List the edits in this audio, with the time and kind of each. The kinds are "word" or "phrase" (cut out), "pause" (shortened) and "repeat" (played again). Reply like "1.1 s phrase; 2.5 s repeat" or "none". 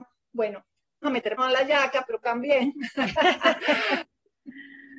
1.0 s phrase; 1.4 s word; 2.2 s word